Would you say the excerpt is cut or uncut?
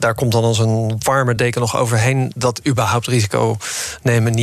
uncut